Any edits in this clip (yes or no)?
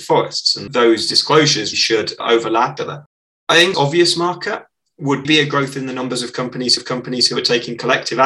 yes